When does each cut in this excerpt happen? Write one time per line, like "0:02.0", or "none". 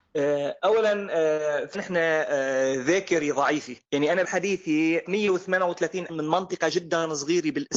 0:01.7
0:03.8
0:04.2
0:05.1
0:06.1